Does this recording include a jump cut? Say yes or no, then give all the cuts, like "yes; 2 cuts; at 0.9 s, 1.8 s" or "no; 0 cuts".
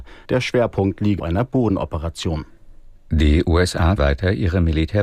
yes; 2 cuts; at 1.2 s, 4.0 s